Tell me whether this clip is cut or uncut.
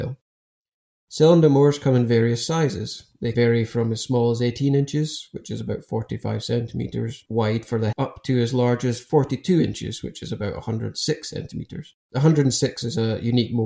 cut